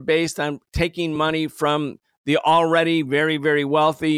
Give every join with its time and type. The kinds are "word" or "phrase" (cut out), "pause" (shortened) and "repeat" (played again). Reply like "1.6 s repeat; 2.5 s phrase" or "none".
none